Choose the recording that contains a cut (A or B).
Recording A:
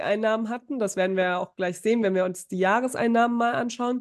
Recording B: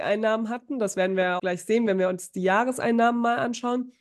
B